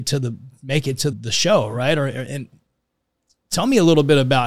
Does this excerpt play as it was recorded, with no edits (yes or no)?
no